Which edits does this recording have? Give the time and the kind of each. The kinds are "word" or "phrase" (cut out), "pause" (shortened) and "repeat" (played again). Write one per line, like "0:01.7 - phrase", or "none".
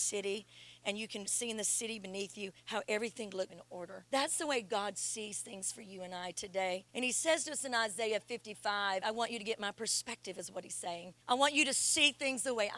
0:01.3 - word
0:02.6 - pause
0:03.5 - word
0:04.1 - pause
0:06.9 - pause
0:09.0 - word
0:11.2 - pause